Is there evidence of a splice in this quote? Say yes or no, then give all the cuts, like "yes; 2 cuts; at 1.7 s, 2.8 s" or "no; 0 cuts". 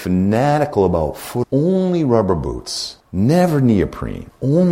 yes; 1 cut; at 1.4 s